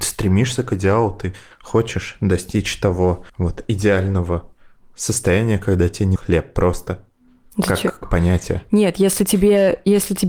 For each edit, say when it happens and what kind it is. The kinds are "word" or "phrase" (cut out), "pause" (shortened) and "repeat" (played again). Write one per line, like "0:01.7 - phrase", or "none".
0:03.3 - pause
0:06.2 - word
0:08.0 - word